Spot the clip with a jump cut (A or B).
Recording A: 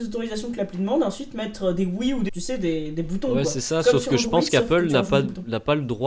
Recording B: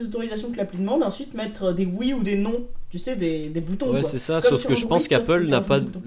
A